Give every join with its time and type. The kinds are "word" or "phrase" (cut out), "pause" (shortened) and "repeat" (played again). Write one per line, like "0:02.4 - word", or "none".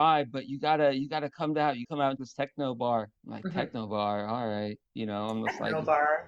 0:01.8 - word
0:02.2 - word
0:03.2 - pause

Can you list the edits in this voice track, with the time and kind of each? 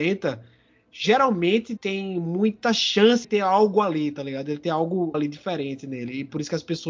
0:01.8 - word
0:03.2 - word
0:05.1 - word

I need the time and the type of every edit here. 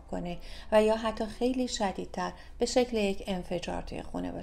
none

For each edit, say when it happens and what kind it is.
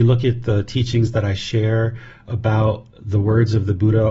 0:02.9 - pause

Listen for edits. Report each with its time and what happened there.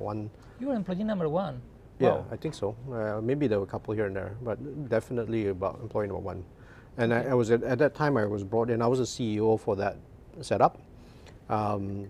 none

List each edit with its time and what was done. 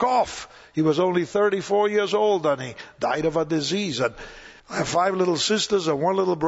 0:04.6 - pause

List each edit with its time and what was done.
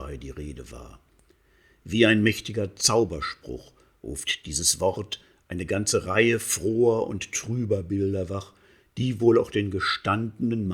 none

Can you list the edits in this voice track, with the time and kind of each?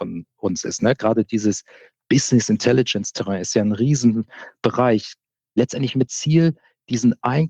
0:06.1 - word

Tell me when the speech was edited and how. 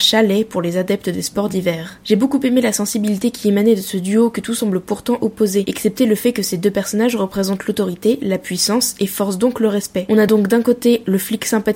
none

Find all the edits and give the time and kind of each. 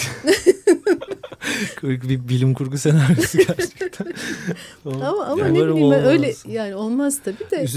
none

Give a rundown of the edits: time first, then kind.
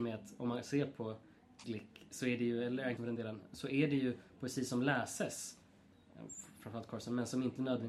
0:01.6 - word
0:03.0 - word

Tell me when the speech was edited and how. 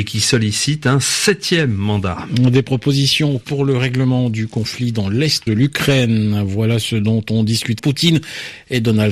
0:03.4 - word
0:05.5 - word
0:07.8 - word

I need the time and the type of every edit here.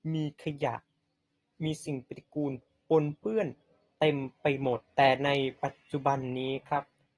0:04.9 - pause
0:05.6 - pause

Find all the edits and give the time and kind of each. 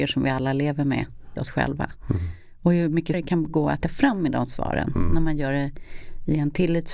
0:01.4 - word
0:03.1 - word
0:03.8 - word

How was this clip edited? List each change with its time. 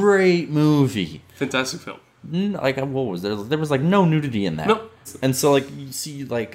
none

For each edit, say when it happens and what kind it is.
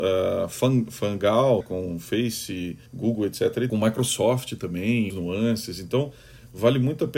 0:01.6 - word
0:02.9 - pause
0:03.7 - phrase
0:05.1 - word

